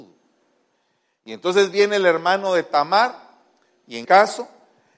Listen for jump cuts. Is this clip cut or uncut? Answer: cut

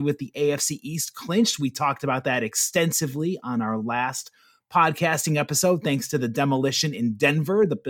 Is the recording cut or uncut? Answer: uncut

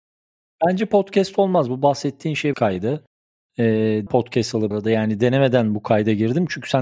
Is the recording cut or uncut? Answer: cut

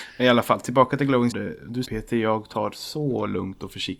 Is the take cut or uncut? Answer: cut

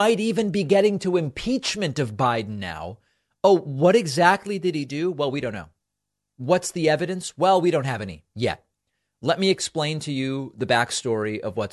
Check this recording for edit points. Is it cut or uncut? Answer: uncut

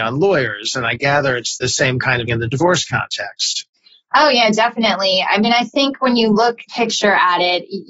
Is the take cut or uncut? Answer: cut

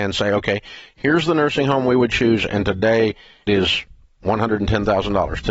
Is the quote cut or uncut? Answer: cut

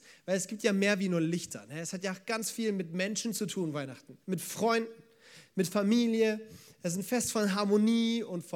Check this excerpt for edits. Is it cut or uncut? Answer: cut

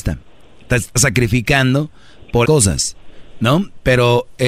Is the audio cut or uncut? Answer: cut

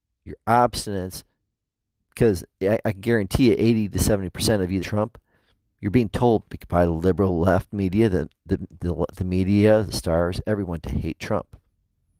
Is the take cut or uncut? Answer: cut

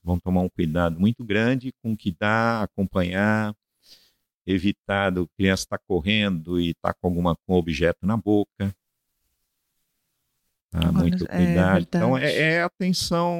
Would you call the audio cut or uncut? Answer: uncut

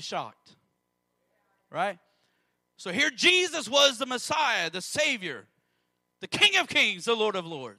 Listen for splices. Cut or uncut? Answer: uncut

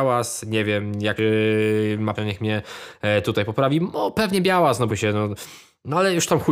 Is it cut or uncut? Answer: cut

